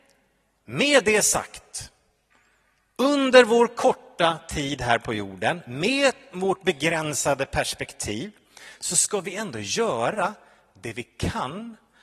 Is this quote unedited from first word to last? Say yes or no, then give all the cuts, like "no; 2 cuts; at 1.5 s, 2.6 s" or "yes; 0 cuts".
yes; 0 cuts